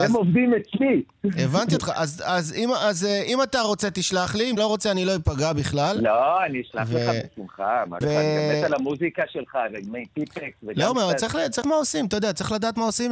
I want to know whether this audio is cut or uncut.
cut